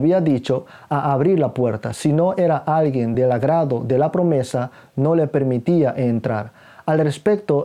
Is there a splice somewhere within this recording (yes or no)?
no